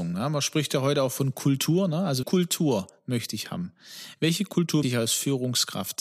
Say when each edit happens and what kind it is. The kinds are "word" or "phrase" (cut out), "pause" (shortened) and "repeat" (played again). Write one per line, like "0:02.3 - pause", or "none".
0:02.2 - word
0:04.8 - word